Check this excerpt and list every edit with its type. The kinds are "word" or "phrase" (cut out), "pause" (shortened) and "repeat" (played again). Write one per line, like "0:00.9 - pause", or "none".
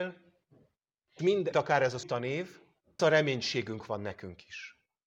0:01.2 - word
0:01.5 - word
0:02.0 - word
0:03.0 - word